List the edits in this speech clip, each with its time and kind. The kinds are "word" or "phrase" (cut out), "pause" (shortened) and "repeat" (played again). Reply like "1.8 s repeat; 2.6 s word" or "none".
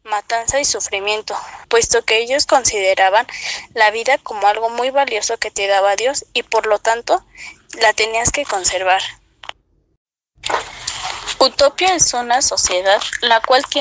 1.6 s pause